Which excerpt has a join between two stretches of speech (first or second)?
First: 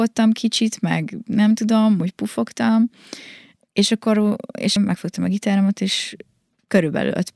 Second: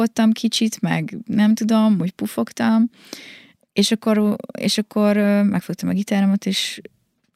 first